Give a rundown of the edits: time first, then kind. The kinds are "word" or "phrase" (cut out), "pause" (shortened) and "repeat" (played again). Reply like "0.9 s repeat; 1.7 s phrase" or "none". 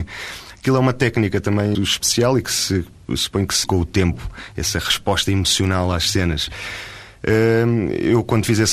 1.7 s word; 3.6 s word